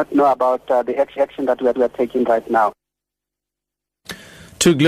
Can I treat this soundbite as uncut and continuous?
no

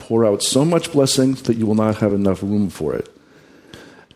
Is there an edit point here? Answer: no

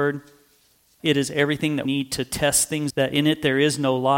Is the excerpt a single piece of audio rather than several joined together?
no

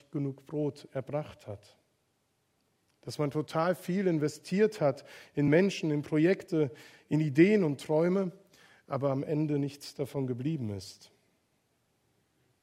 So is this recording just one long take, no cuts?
yes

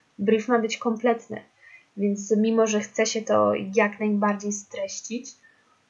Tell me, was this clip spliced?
no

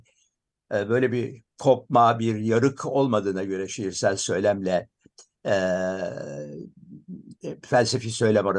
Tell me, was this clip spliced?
no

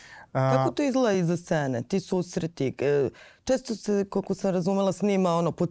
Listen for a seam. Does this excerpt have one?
no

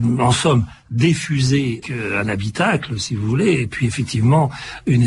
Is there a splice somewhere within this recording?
yes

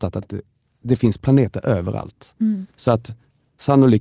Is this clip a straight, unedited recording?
no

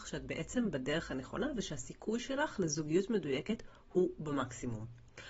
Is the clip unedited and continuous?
yes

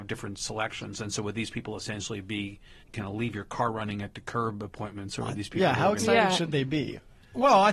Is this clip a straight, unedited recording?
no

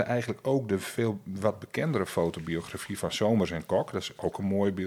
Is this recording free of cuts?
yes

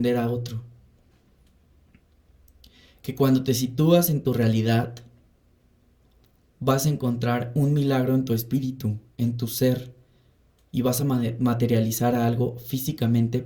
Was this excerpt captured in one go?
yes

